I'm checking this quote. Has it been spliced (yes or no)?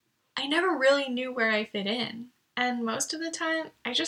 no